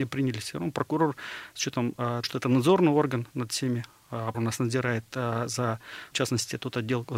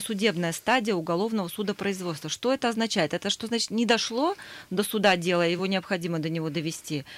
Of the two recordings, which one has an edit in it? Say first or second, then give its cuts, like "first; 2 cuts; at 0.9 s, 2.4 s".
first; 3 cuts; at 2.2 s, 4.3 s, 6.1 s